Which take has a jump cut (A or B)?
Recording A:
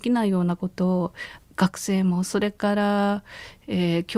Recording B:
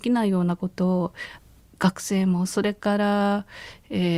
A